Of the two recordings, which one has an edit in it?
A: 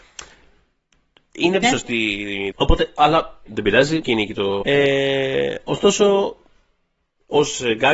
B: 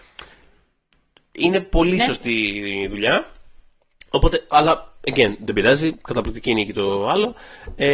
A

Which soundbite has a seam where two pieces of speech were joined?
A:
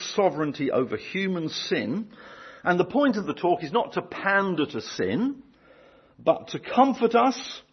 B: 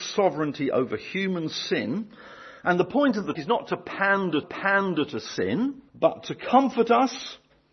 B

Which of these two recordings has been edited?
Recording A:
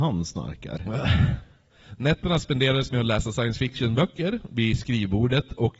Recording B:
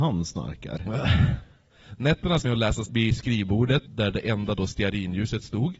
B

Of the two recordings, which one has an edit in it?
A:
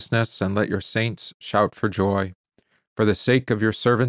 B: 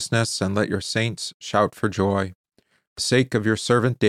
B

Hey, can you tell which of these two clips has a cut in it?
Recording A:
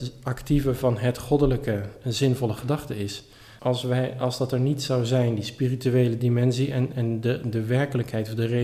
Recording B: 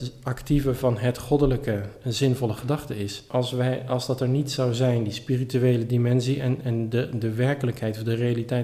B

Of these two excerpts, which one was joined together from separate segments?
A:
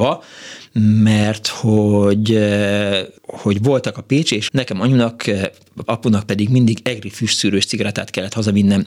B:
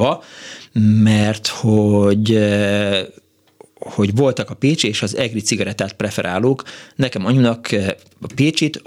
A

